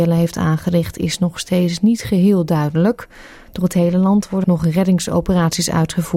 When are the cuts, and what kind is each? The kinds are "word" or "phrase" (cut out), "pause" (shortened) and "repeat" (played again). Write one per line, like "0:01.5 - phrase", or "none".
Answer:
0:04.4 - word